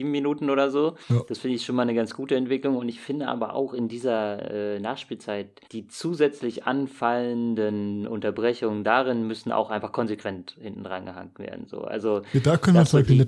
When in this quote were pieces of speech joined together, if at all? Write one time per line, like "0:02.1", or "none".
0:01.0
0:05.7